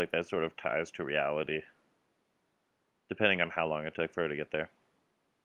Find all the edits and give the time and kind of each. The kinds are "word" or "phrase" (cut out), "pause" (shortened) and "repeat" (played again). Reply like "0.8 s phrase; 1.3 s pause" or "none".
none